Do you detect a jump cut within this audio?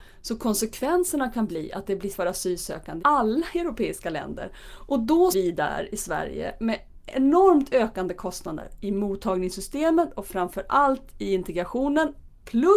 yes; 3 cuts; at 2.1 s, 3.0 s, 5.3 s

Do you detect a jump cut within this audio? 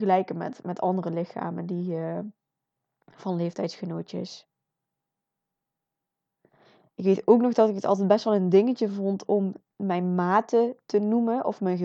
no; 0 cuts

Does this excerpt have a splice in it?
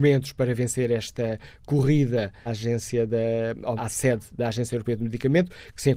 yes; 2 cuts; at 2.5 s, 3.8 s

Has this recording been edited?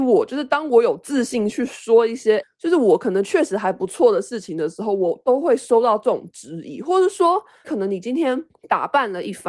yes; 3 cuts; at 2.4 s, 7.6 s, 8.5 s

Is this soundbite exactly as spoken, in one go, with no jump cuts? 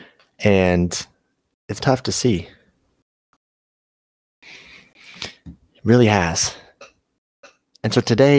no; 1 cut; at 1.8 s

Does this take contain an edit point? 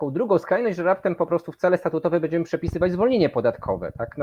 no; 0 cuts

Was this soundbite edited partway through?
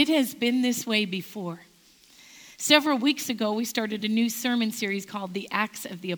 no; 0 cuts

